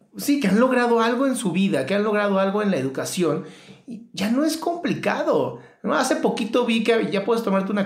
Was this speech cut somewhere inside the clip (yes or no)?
no